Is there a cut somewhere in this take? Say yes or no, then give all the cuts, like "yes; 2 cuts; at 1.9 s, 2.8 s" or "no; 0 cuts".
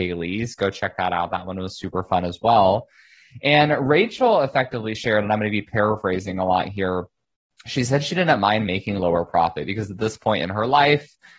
no; 0 cuts